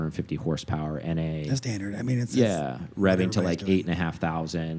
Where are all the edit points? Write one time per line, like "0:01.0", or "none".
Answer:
none